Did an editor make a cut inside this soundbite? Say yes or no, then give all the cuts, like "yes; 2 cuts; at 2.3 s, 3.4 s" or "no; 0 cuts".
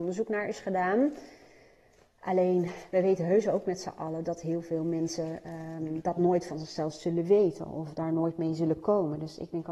no; 0 cuts